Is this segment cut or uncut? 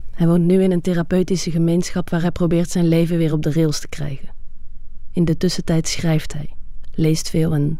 uncut